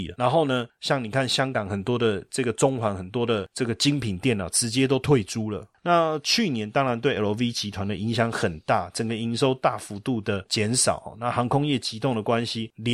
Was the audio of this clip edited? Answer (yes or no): no